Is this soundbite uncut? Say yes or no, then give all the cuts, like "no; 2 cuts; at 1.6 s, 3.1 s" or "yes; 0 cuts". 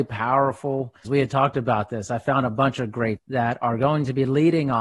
no; 2 cuts; at 1.0 s, 3.2 s